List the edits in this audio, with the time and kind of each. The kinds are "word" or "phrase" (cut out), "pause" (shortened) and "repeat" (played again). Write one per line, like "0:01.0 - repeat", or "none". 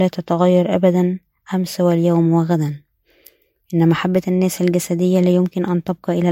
none